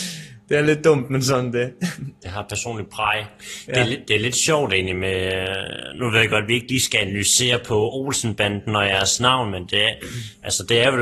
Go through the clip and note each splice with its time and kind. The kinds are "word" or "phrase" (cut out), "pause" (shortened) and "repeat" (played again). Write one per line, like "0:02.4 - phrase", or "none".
none